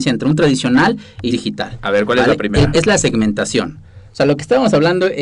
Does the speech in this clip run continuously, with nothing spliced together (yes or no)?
no